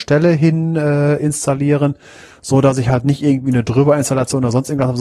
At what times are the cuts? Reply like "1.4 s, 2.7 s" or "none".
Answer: none

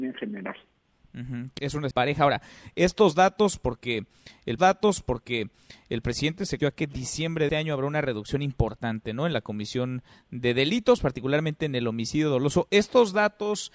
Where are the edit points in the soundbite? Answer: 1.6 s, 1.9 s, 4.6 s, 6.6 s, 7.5 s

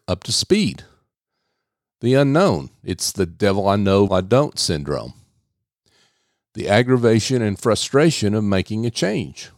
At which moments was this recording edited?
4.1 s

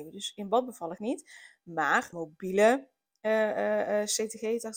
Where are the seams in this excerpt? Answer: 1.0 s, 2.1 s

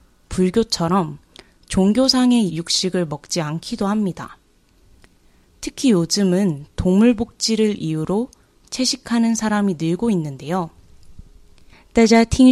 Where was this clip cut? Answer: 2.5 s

